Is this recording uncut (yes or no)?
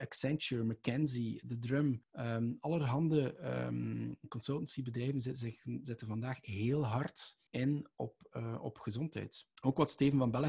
no